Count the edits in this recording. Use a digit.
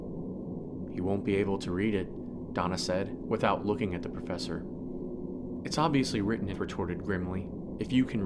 1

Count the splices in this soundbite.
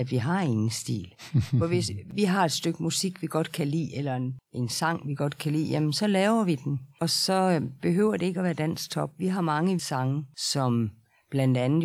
1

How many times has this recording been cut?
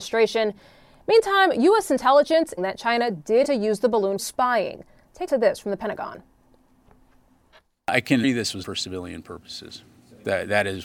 6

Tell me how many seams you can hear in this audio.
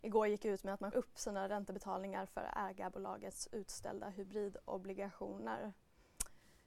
1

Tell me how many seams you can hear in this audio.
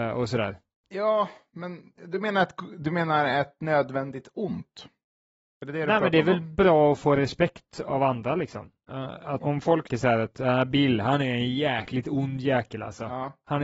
2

